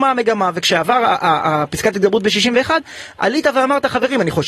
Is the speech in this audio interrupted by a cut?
no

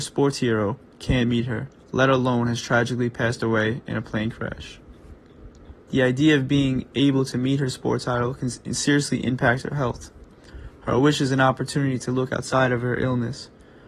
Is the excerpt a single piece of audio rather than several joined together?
no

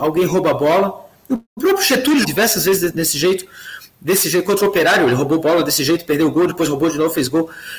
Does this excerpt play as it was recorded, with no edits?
no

